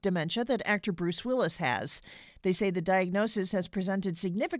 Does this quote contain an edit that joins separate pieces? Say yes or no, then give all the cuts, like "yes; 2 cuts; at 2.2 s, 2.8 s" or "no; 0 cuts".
no; 0 cuts